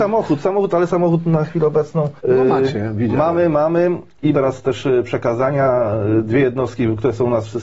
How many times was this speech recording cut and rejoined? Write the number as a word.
two